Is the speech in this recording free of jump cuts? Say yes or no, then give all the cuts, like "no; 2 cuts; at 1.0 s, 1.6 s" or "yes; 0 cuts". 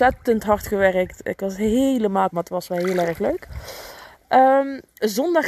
no; 1 cut; at 2.3 s